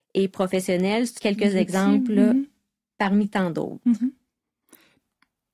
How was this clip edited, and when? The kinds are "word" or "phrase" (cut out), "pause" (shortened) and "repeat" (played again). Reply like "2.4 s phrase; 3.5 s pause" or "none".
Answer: 1.2 s phrase